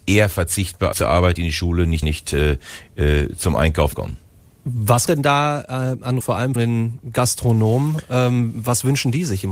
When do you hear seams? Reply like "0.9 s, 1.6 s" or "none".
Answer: 0.9 s, 1.4 s, 2.0 s, 3.9 s, 5.1 s, 6.2 s, 6.6 s